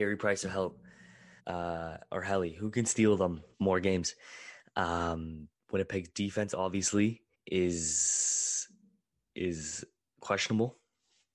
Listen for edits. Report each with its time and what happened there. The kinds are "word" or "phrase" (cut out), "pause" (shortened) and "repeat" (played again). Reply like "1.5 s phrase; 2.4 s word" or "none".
1.4 s pause; 3.5 s pause; 7.3 s pause